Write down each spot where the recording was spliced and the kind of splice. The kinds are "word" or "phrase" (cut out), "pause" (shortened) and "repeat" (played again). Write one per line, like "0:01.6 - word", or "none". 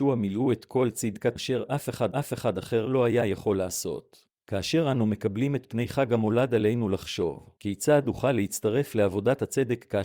0:01.4 - word
0:02.1 - repeat
0:04.4 - pause
0:07.6 - pause